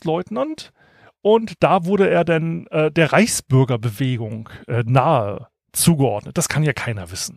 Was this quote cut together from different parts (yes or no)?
no